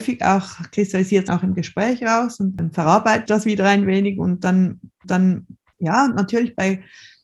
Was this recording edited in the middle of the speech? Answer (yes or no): yes